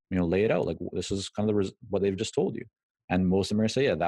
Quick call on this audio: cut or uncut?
uncut